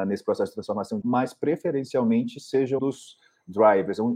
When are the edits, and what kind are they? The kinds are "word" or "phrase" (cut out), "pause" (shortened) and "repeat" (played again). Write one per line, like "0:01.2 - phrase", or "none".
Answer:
0:01.0 - word
0:02.8 - word